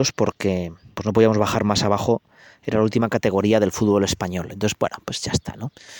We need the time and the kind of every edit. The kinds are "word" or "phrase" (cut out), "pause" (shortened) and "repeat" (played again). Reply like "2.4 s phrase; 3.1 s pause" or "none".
0.9 s word